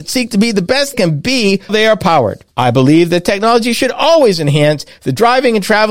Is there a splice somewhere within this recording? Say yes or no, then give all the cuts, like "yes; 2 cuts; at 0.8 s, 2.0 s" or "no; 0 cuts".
yes; 3 cuts; at 0.9 s, 1.7 s, 2.5 s